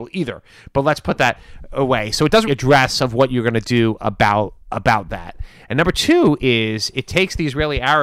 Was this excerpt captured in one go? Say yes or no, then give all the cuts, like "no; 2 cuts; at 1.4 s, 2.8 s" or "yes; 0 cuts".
no; 2 cuts; at 2.5 s, 4.6 s